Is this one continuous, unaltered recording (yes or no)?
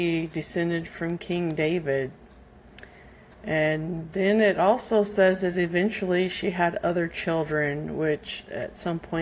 yes